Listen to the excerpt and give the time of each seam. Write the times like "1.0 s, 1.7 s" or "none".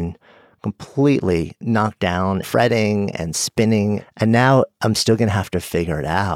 2.4 s

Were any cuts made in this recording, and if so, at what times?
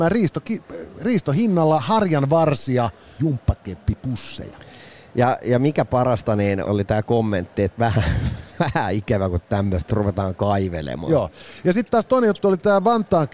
3.2 s, 6.6 s, 9.9 s

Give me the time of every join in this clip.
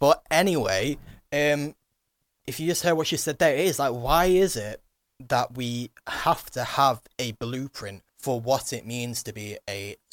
8.1 s

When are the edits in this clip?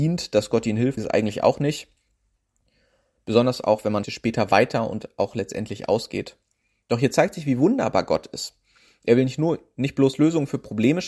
1.0 s, 4.0 s

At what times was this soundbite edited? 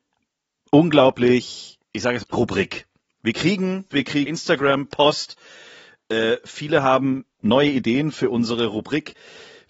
1.8 s, 2.2 s, 3.9 s, 4.3 s

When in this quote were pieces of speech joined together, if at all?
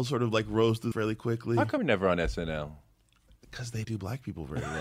0.9 s, 1.8 s, 3.8 s

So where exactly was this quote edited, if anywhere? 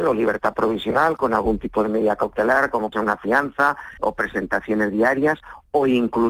2.9 s, 4.0 s

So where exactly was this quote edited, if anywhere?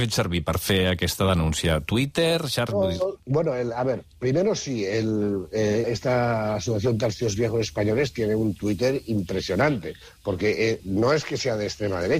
3.2 s, 5.8 s, 10.8 s

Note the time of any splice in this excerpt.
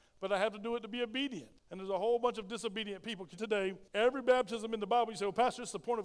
1.6 s, 3.4 s, 3.9 s

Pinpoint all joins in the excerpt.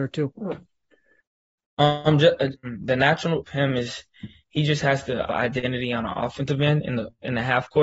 2.5 s, 3.5 s, 5.3 s

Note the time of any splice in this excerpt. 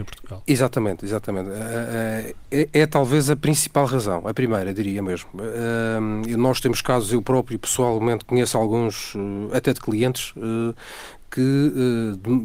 none

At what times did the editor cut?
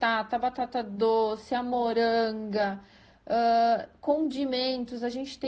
none

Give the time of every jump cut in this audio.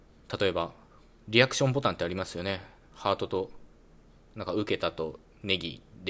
none

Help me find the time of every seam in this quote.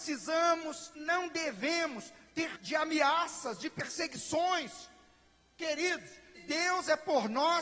0.9 s, 2.5 s, 6.3 s

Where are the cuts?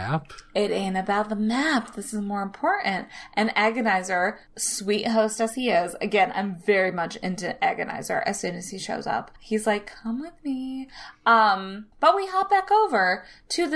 9.4 s, 11.9 s

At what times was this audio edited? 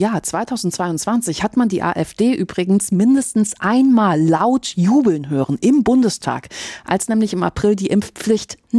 none

